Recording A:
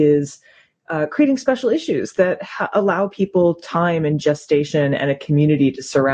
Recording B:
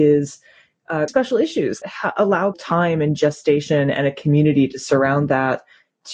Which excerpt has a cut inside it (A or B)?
B